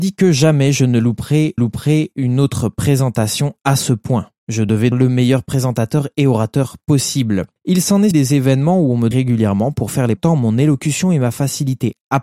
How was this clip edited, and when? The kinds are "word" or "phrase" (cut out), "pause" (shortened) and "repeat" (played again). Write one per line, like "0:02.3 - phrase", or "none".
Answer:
0:01.6 - repeat
0:04.9 - word
0:07.6 - pause
0:08.1 - word
0:09.1 - word
0:10.2 - word